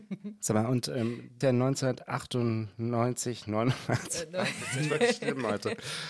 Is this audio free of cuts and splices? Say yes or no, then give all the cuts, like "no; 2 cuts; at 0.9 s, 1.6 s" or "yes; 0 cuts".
no; 1 cut; at 1.4 s